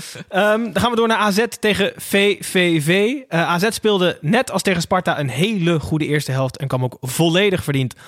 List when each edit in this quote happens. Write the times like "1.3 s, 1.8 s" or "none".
none